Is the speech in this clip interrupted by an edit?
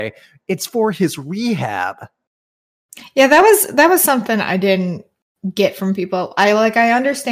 no; 0 cuts

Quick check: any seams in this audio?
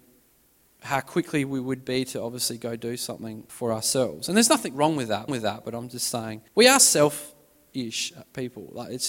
yes; 3 cuts; at 3.5 s, 5.3 s, 6.5 s

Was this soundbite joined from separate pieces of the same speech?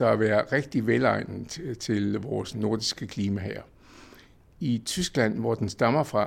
no; 0 cuts

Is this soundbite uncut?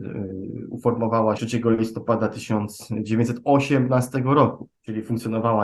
no; 2 cuts; at 1.4 s, 4.7 s

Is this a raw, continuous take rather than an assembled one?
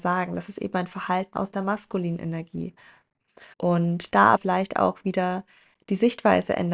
no; 3 cuts; at 1.3 s, 3.5 s, 4.4 s

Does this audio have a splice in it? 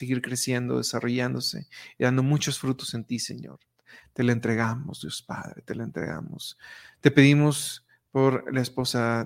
no; 0 cuts

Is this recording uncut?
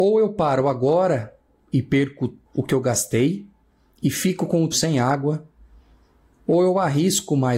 no; 2 cuts; at 2.5 s, 4.7 s

